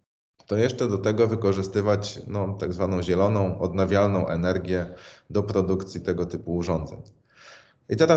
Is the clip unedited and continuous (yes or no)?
yes